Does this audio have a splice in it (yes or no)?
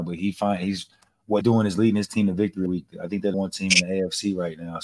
yes